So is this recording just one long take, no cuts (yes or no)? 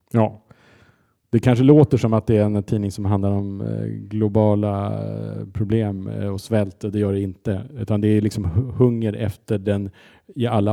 yes